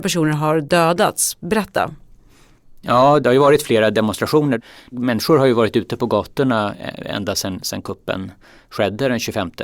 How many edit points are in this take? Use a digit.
0